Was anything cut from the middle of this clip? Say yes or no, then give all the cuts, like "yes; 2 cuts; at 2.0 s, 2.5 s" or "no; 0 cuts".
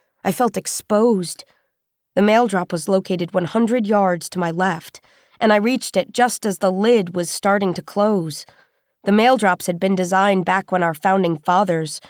no; 0 cuts